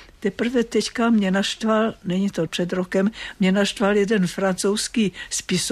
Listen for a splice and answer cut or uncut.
cut